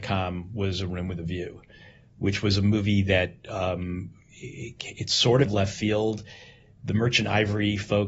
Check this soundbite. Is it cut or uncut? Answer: cut